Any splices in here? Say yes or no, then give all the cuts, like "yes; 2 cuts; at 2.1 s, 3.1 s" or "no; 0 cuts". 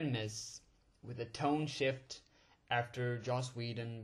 no; 0 cuts